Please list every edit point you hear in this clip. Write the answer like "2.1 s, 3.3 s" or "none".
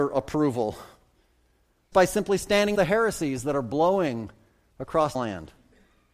1.9 s, 2.7 s, 5.1 s